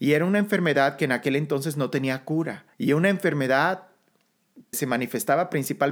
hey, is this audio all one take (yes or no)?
no